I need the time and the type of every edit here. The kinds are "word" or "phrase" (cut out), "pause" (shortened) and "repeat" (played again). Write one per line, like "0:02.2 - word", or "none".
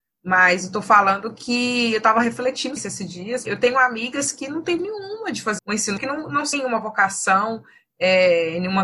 0:02.8 - word
0:03.5 - word
0:04.8 - word
0:05.6 - word
0:06.0 - word
0:06.5 - word